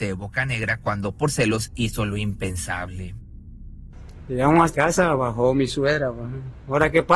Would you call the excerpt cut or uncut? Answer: cut